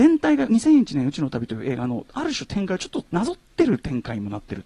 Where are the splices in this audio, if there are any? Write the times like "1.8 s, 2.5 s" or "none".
3.1 s